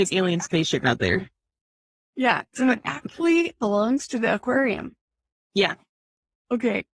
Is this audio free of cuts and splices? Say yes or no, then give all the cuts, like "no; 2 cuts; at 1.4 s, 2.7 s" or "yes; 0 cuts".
yes; 0 cuts